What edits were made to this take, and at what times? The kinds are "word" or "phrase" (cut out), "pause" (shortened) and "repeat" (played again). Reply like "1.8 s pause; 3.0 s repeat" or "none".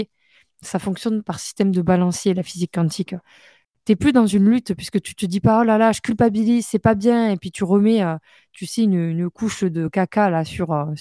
none